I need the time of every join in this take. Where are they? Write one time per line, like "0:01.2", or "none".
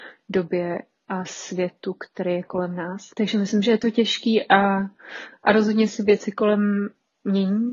0:03.1